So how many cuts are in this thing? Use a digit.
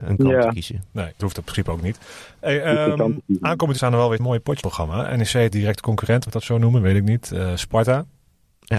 6